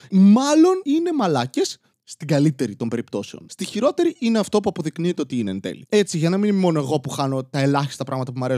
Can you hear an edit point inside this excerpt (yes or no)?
no